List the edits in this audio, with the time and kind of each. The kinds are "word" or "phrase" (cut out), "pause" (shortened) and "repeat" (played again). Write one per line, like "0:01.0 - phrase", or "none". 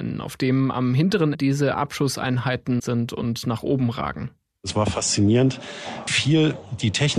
0:01.3 - word
0:02.8 - word
0:06.1 - word